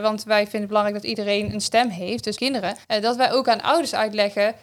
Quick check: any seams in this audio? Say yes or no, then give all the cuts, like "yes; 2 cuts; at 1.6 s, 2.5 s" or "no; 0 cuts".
yes; 2 cuts; at 2.4 s, 2.8 s